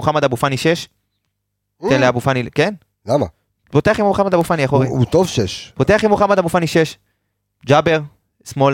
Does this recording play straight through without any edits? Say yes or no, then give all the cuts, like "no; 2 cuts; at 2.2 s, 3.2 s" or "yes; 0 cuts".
yes; 0 cuts